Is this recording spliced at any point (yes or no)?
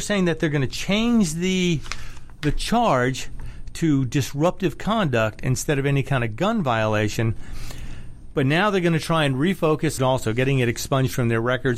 yes